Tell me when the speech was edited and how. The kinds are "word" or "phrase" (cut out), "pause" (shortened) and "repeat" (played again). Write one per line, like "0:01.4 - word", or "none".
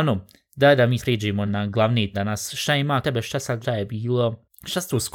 0:01.0 - word
0:01.5 - word
0:02.1 - word
0:03.0 - word
0:03.6 - word